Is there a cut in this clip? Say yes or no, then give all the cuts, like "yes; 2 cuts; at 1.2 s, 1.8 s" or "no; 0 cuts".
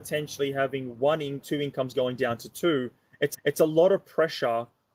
yes; 2 cuts; at 1.4 s, 3.3 s